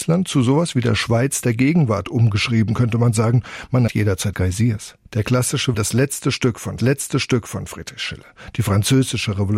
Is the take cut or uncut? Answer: cut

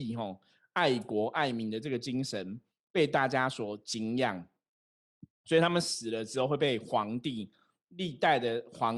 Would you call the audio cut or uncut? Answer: uncut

